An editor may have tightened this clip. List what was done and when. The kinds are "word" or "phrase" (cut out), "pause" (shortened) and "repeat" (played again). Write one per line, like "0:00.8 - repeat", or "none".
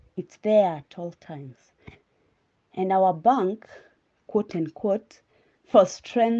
none